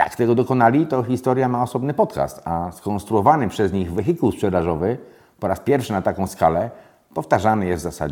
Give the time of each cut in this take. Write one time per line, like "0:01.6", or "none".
none